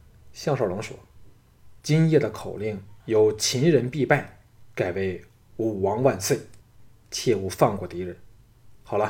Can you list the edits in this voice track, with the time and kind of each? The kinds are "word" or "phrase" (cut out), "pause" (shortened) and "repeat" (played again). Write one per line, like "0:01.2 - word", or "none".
0:01.8 - pause
0:03.0 - pause
0:06.6 - pause

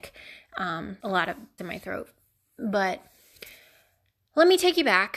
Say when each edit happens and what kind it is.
0:01.0 - word
0:01.6 - word

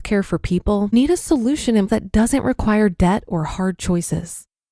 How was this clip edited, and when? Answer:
0:00.9 - word
0:01.9 - word

